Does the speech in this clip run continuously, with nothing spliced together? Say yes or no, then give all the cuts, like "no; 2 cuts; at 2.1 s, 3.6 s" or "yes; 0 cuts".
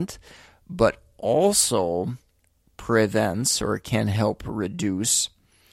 yes; 0 cuts